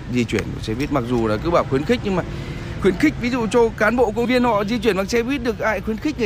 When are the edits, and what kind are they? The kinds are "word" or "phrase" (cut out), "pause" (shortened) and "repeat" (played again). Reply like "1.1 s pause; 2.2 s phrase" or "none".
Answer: 4.2 s word